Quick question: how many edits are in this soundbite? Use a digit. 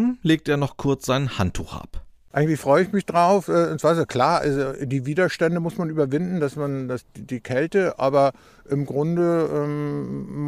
0